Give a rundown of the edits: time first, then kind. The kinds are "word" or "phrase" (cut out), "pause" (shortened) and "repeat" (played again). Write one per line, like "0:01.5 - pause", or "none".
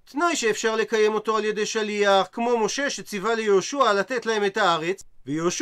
none